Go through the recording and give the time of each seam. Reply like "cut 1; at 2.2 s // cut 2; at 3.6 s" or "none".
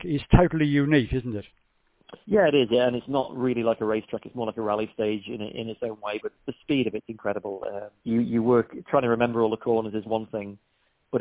cut 1; at 2.2 s // cut 2; at 6.4 s // cut 3; at 8.0 s